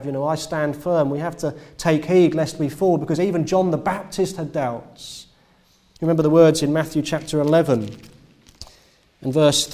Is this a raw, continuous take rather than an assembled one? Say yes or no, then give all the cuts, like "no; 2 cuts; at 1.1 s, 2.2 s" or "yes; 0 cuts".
yes; 0 cuts